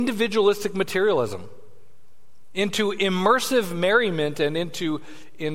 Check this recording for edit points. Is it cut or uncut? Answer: uncut